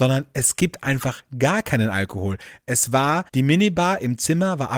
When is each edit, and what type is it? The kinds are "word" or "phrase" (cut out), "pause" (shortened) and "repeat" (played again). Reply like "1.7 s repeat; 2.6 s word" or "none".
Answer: 3.3 s pause